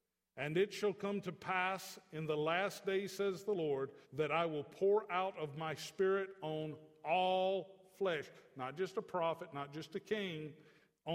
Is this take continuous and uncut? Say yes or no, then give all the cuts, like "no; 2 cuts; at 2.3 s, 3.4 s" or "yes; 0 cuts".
no; 1 cut; at 4.0 s